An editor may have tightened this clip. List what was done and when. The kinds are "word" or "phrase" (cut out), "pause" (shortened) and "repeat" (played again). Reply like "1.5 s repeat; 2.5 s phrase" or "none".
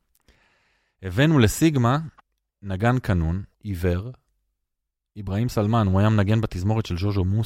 2.2 s pause; 3.5 s pause

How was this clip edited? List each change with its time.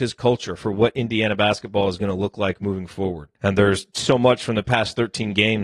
3.3 s pause

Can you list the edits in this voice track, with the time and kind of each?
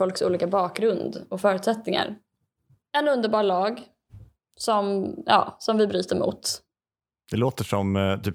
none

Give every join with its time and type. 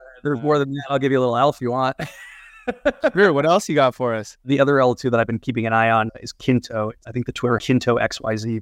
1.6 s word; 6.1 s word; 7.6 s phrase

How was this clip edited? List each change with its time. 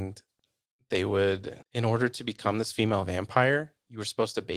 1.6 s pause

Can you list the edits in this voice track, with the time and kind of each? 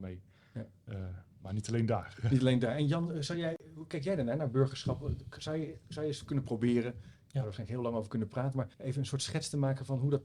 8.7 s pause

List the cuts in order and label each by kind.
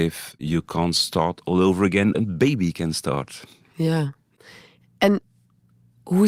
2.1 s word

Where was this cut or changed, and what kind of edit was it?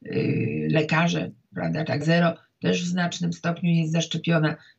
2.0 s word

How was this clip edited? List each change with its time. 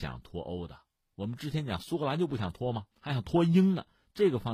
2.9 s pause

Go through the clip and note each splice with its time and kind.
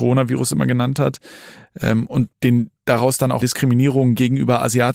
2.3 s pause; 3.4 s word

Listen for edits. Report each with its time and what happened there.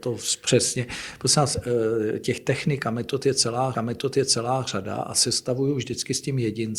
3.7 s repeat

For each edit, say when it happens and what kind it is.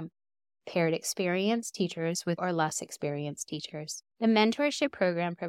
2.4 s word; 4.1 s pause

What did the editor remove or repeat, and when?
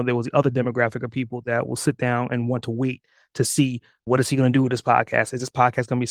4.1 s word

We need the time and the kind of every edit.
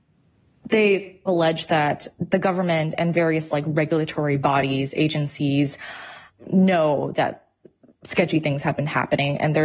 none

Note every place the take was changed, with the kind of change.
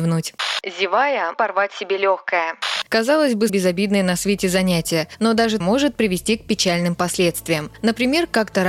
1.3 s word; 3.5 s word; 5.6 s phrase

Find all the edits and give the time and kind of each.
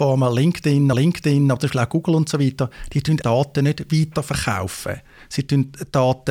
0.9 s repeat; 3.2 s word

